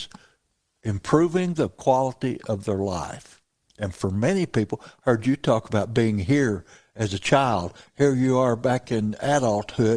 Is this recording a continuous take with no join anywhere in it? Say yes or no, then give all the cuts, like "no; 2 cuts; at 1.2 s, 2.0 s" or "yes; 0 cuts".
yes; 0 cuts